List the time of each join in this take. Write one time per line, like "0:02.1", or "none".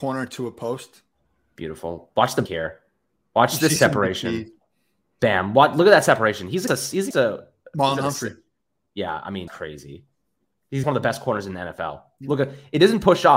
0:02.5
0:06.7
0:07.1
0:09.5
0:10.8